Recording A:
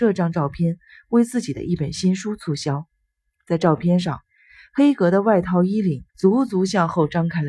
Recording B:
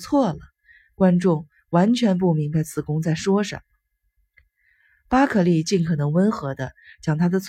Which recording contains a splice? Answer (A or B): A